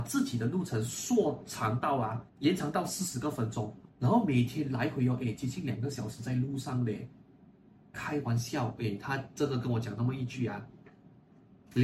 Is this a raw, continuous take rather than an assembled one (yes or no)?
no